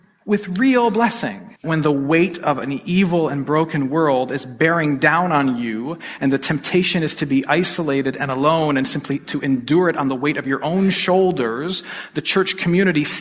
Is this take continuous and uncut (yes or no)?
no